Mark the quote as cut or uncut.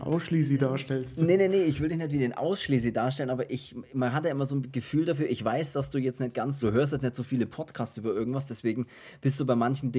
cut